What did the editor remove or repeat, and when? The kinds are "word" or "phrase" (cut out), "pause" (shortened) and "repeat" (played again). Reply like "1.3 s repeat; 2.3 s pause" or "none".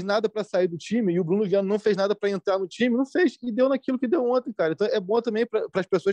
none